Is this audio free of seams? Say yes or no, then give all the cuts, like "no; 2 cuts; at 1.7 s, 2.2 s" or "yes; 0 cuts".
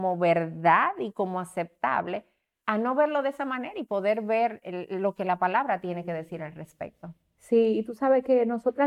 yes; 0 cuts